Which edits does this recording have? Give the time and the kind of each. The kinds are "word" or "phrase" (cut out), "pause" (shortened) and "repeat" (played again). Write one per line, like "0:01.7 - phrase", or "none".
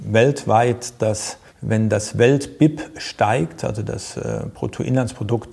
0:01.5 - pause